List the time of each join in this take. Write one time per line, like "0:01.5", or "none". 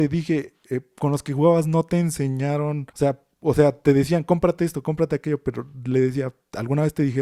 0:02.9

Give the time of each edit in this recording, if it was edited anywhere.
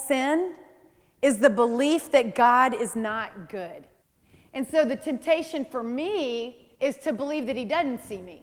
0:04.0
0:06.7

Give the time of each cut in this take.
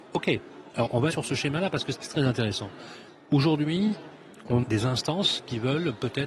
0:01.1
0:02.0
0:04.6

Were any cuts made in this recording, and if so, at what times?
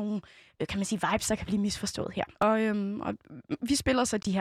0:02.3

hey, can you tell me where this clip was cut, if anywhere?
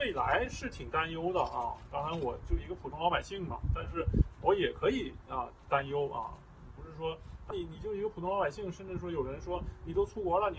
0:07.5

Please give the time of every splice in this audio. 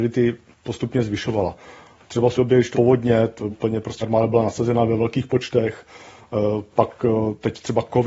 0:02.4
0:02.7
0:03.5
0:04.0

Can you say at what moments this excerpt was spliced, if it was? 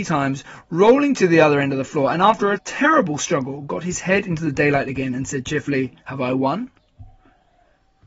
0:06.0

